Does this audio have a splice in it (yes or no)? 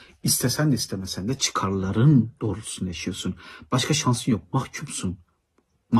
no